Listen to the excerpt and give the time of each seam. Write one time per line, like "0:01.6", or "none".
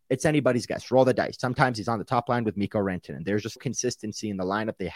0:03.6